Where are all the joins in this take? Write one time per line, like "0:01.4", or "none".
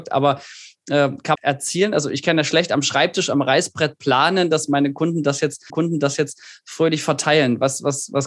0:01.4
0:05.7